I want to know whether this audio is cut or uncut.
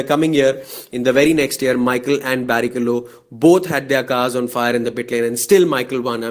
uncut